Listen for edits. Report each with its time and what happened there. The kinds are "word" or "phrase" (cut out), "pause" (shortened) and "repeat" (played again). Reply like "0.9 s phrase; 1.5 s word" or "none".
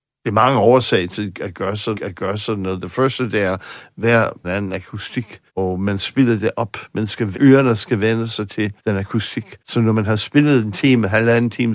1.9 s repeat; 4.4 s phrase; 5.5 s pause; 6.0 s word; 7.3 s word; 8.8 s pause; 9.6 s pause